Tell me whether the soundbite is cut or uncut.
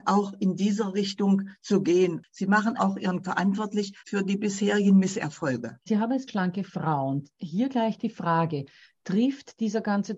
cut